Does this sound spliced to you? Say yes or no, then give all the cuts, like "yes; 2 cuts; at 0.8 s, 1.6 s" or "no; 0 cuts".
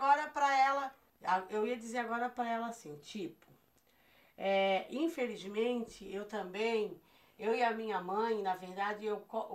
no; 0 cuts